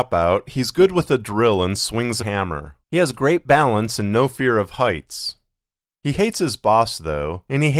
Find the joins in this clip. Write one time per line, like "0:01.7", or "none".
0:02.2
0:02.8